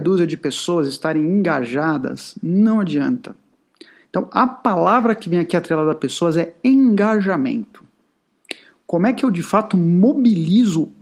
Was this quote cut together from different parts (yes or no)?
no